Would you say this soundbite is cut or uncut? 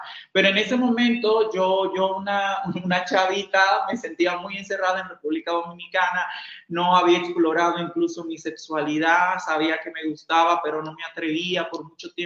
uncut